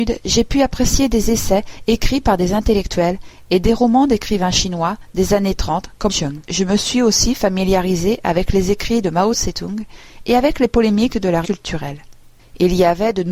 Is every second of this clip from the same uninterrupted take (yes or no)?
no